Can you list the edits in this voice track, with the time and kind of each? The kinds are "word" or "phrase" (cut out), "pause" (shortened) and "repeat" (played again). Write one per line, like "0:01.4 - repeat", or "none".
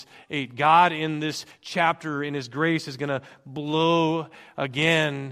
none